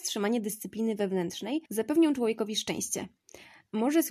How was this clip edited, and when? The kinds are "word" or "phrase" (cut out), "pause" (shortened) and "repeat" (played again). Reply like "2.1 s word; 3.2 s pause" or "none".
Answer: 1.7 s pause